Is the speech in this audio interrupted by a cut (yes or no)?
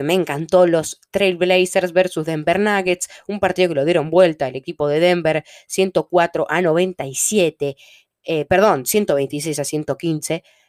no